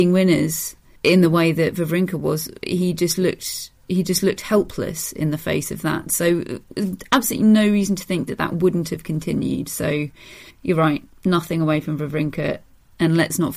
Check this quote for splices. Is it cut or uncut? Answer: cut